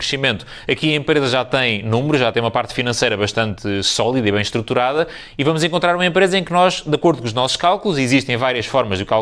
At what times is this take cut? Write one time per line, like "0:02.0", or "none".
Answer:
none